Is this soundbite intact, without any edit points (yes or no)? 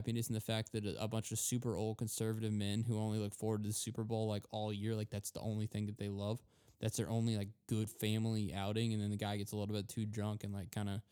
yes